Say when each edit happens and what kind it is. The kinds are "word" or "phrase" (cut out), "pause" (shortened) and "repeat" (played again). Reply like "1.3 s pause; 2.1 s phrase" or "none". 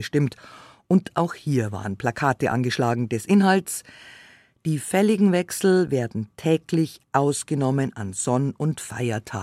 none

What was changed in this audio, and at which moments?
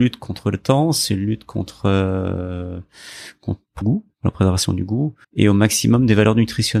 3.8 s word; 5.2 s pause

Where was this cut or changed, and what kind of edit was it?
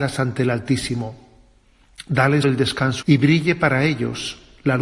2.4 s word; 3.0 s word

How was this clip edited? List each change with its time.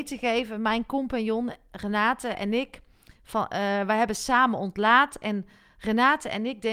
none

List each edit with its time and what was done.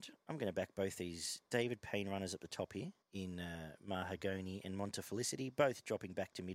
3.0 s pause

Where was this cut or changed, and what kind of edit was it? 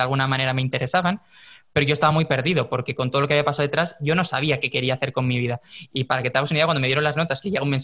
none

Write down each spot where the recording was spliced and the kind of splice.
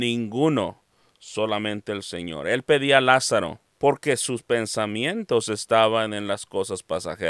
3.7 s pause

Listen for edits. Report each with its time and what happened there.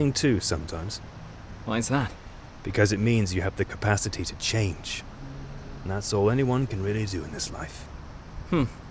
none

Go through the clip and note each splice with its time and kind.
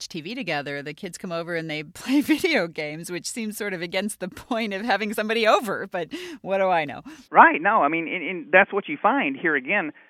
7.2 s pause

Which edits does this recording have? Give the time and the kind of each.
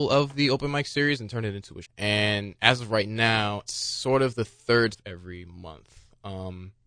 1.8 s word; 3.7 s word; 4.9 s word

